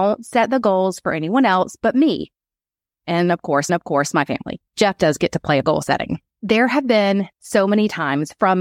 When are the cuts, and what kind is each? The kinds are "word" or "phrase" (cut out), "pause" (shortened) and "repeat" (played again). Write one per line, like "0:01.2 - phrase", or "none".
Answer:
0:03.7 - repeat
0:04.7 - pause
0:05.6 - phrase
0:06.3 - pause
0:07.3 - pause